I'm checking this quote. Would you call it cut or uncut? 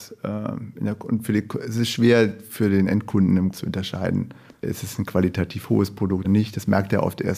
cut